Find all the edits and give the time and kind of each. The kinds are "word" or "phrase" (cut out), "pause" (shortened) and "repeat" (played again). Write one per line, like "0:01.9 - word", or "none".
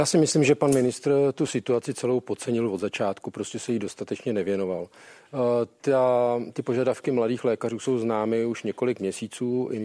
none

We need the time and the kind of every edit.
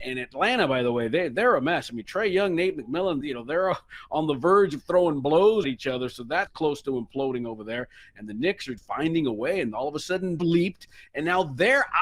0:03.2 - word
0:05.6 - word
0:06.5 - word
0:08.8 - word
0:10.4 - word

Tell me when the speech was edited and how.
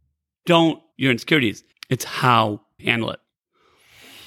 0:00.9 - word
0:01.7 - pause
0:02.8 - word

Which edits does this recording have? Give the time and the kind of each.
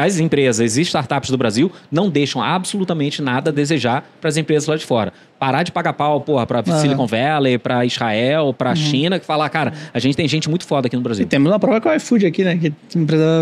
none

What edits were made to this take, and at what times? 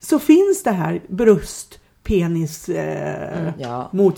none

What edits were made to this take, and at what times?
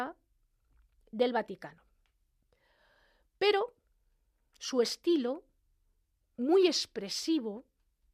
none

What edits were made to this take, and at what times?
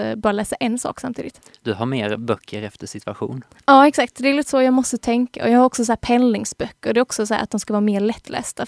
none

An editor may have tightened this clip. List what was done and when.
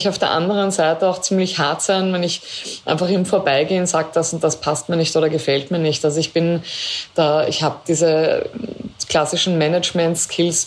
none

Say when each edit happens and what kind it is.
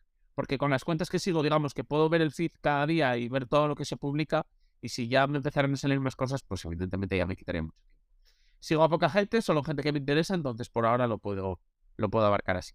none

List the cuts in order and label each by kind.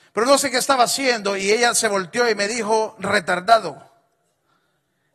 none

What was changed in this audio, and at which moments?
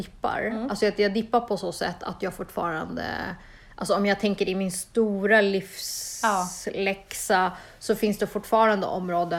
none

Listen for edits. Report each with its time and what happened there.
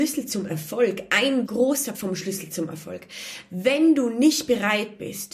0:01.5 - word
0:01.9 - word

